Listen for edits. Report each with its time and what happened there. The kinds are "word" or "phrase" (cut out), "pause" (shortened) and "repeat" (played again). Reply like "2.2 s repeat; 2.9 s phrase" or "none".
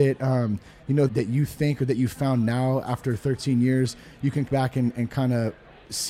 1.1 s word; 4.5 s phrase

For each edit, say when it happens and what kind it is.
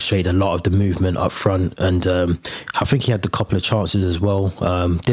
none

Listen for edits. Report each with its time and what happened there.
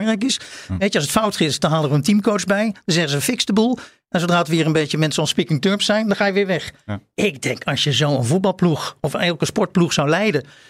none

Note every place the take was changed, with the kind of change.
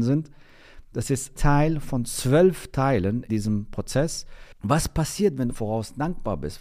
1.4 s word; 3.3 s word; 5.5 s word

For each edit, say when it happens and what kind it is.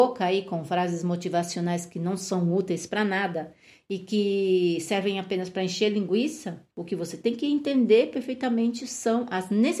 6.7 s pause

